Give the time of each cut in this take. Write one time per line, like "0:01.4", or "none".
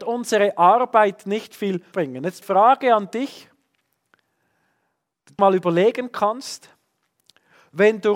0:01.9
0:02.4
0:05.4